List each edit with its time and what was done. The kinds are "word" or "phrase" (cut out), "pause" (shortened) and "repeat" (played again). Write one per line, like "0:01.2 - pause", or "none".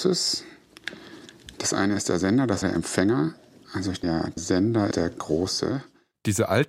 0:02.6 - word
0:04.0 - word
0:04.4 - word
0:04.9 - word